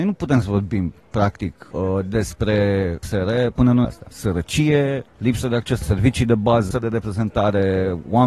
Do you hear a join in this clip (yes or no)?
yes